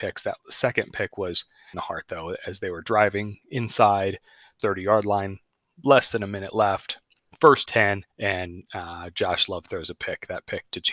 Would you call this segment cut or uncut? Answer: cut